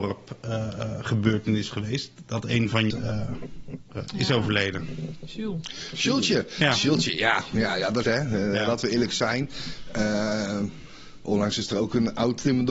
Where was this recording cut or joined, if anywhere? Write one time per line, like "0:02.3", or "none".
0:01.7
0:02.9
0:08.0